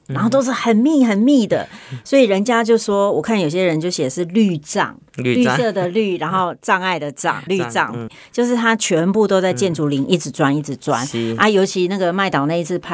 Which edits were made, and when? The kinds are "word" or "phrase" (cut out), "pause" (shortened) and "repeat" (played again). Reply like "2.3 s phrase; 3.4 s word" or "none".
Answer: 7.5 s word; 8.1 s word